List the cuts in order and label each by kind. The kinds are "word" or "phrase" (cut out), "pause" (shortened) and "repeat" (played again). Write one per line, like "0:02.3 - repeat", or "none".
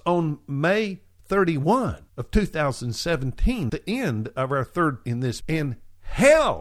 0:02.1 - pause
0:03.7 - word
0:05.0 - word
0:05.4 - word